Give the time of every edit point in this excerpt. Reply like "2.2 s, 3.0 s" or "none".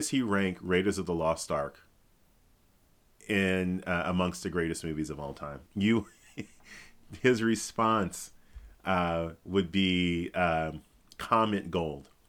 5.7 s